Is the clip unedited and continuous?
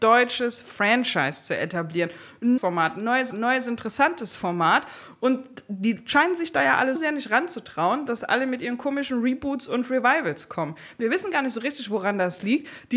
no; 3 cuts; at 2.6 s, 3.3 s, 7.0 s

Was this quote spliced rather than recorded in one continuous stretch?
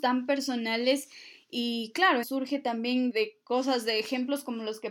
yes; 2 cuts; at 2.2 s, 3.1 s

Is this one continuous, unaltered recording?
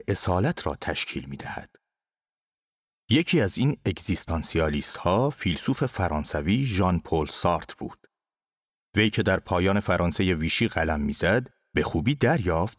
yes; 0 cuts

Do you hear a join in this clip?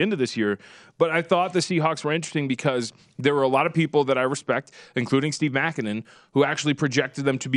no; 0 cuts

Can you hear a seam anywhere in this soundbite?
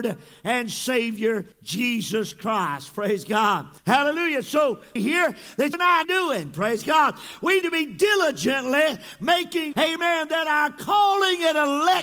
yes; 7 cuts; at 1.5 s, 3.8 s, 5.0 s, 5.7 s, 6.0 s, 7.6 s, 9.7 s

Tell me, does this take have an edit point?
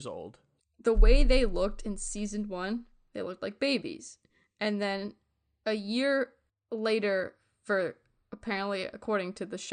no; 0 cuts

